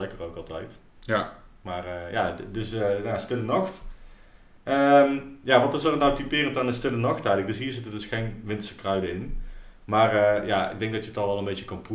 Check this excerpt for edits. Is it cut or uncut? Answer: uncut